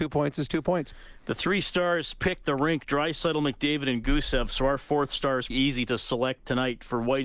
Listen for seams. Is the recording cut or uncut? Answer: cut